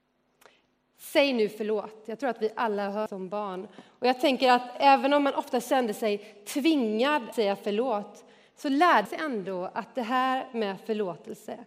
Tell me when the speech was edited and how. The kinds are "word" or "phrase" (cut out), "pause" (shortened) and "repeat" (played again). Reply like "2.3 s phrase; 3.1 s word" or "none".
3.1 s phrase; 7.3 s word; 9.1 s word